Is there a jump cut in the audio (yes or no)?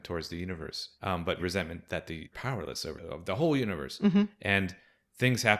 yes